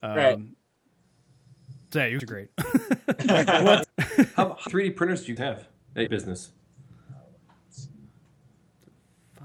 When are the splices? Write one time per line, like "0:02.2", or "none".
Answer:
0:02.2
0:03.8
0:04.7
0:05.4
0:06.1